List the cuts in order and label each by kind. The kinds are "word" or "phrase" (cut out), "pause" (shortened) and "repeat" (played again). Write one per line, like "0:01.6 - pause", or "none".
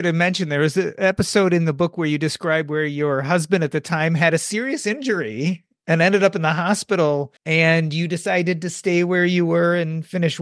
0:07.4 - pause